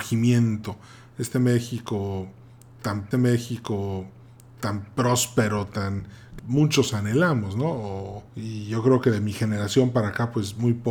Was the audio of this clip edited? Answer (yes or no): yes